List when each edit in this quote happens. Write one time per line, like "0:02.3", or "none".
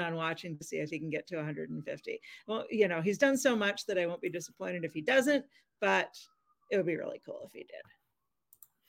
none